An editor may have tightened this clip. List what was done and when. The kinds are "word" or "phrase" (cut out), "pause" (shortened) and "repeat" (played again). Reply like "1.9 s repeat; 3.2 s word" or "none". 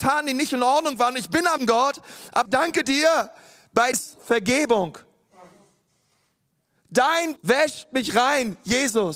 1.6 s word; 2.5 s word; 3.9 s word; 7.4 s word